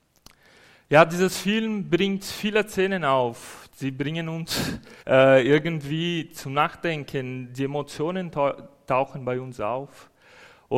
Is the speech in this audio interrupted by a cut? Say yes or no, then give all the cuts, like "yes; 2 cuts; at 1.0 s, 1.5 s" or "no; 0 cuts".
yes; 1 cut; at 5.0 s